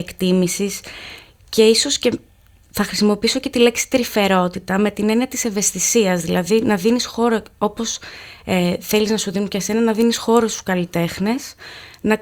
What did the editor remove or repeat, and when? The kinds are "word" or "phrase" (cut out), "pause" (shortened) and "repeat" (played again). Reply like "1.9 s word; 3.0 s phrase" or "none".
none